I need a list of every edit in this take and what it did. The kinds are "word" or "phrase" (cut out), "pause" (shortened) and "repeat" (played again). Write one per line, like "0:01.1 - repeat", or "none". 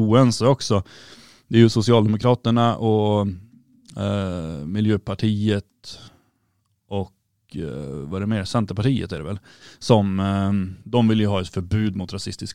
none